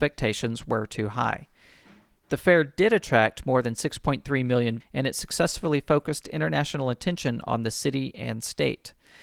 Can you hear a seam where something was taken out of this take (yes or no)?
yes